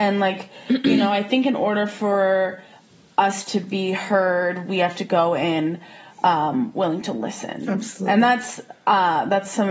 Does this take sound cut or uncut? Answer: uncut